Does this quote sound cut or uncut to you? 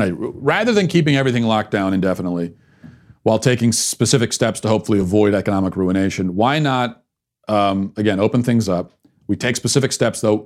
uncut